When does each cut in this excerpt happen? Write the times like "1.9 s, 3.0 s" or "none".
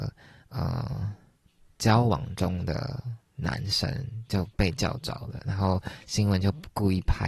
1.4 s